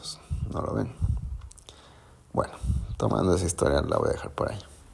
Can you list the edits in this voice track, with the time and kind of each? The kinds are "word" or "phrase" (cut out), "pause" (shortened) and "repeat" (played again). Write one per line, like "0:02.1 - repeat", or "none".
none